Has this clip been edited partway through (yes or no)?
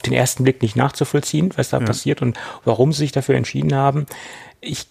no